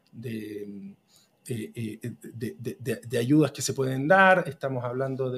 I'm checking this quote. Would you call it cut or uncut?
uncut